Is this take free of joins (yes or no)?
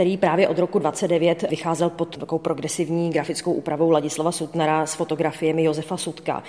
no